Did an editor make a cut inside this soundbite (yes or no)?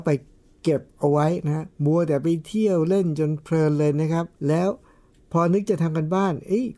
yes